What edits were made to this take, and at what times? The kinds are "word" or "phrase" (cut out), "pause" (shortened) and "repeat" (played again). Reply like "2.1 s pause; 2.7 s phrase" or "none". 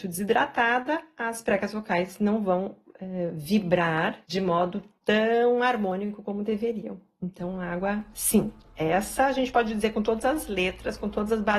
4.2 s pause